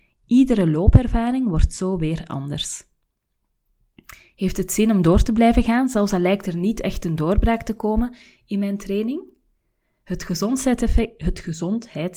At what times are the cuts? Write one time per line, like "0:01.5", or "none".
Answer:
none